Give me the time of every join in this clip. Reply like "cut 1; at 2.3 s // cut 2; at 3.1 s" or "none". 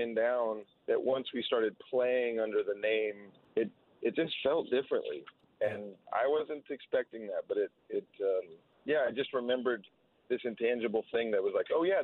none

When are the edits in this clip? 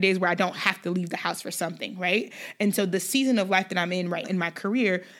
cut 1; at 4.2 s

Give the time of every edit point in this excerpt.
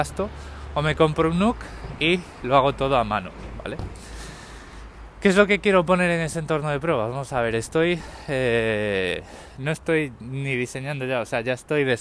none

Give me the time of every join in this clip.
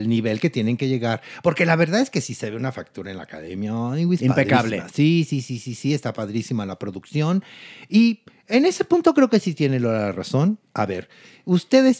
none

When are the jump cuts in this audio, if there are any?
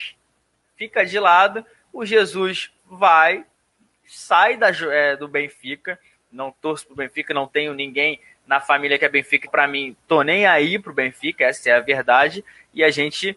cut 1; at 9.5 s

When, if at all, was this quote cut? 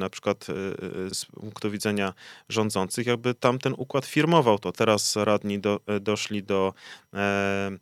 cut 1; at 1.1 s

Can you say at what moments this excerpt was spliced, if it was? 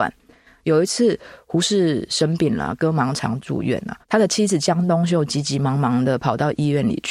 cut 1; at 4.0 s

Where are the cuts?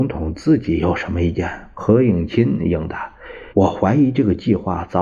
cut 1; at 3.5 s

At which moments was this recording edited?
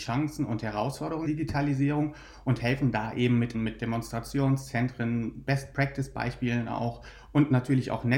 cut 1; at 1.3 s // cut 2; at 3.5 s

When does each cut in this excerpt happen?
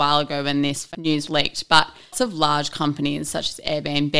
cut 1; at 1.3 s // cut 2; at 2.1 s

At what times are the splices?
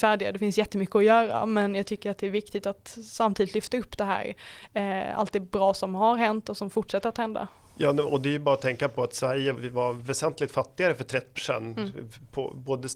cut 1; at 9.5 s // cut 2; at 11.4 s

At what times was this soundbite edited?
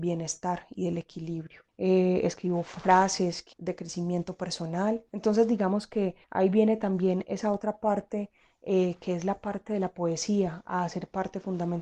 cut 1; at 1.7 s // cut 2; at 3.5 s // cut 3; at 5.1 s // cut 4; at 6.2 s

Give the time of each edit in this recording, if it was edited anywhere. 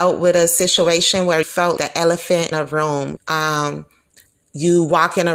cut 1; at 1.4 s // cut 2; at 1.8 s // cut 3; at 2.5 s // cut 4; at 3.2 s

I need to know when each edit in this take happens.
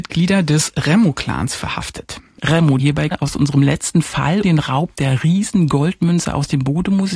cut 1; at 2.8 s // cut 2; at 3.1 s // cut 3; at 4.4 s

